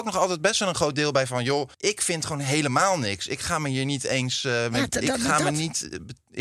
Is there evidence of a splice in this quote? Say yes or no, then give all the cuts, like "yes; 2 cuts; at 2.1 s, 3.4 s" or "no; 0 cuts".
yes; 1 cut; at 1.7 s